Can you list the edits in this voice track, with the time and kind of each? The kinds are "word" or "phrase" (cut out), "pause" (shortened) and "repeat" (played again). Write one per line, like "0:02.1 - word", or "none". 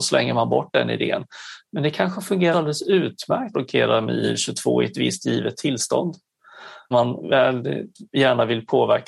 0:02.5 - word
0:03.5 - word
0:06.9 - word